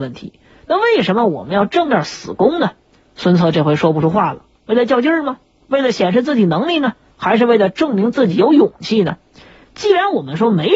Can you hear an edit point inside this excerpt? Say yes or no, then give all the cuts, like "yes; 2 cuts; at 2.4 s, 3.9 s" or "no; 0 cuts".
no; 0 cuts